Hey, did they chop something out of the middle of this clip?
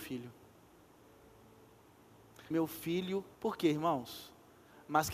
yes; 2 cuts; at 2.5 s, 3.3 s

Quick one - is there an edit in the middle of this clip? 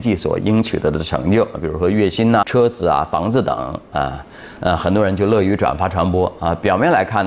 yes; 1 cut; at 2.4 s

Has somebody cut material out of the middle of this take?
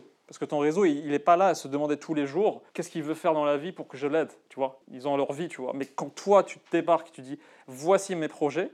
yes; 2 cuts; at 2.7 s, 4.8 s

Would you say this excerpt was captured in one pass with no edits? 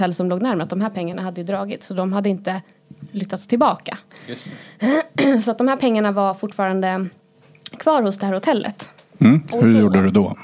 yes; 0 cuts

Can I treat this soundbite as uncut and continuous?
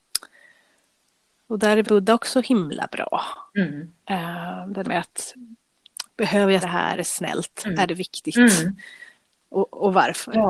no; 5 cuts; at 1.8 s, 4.8 s, 6.0 s, 6.6 s, 7.0 s

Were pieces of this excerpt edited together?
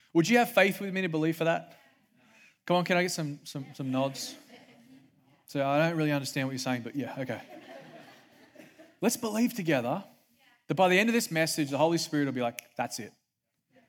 no; 0 cuts

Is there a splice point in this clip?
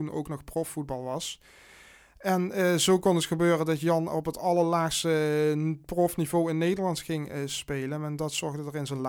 no; 0 cuts

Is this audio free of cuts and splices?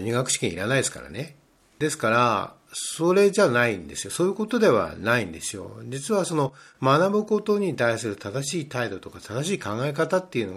yes; 0 cuts

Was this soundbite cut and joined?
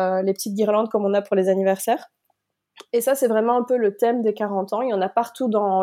no; 0 cuts

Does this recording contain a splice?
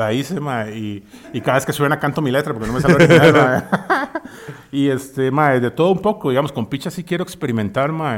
no; 0 cuts

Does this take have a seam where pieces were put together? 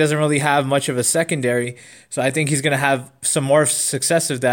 no; 0 cuts

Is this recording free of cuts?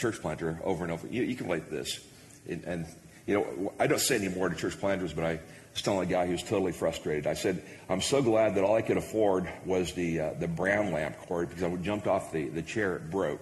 yes; 0 cuts

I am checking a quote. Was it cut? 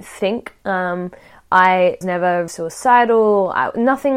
yes; 2 cuts; at 2.0 s, 2.5 s

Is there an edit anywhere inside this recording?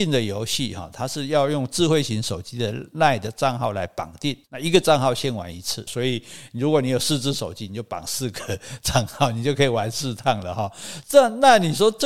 yes; 2 cuts; at 4.4 s, 5.9 s

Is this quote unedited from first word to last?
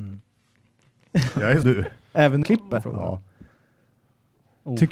no; 3 cuts; at 1.6 s, 2.4 s, 2.8 s

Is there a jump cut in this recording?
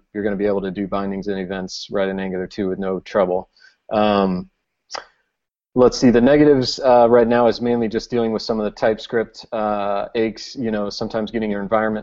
no; 0 cuts

